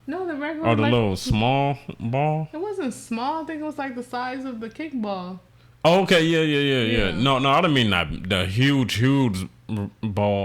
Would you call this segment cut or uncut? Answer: uncut